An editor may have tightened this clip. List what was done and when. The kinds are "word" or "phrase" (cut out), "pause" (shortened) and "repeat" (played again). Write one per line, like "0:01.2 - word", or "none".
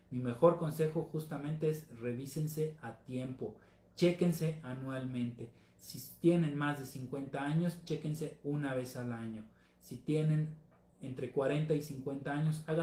none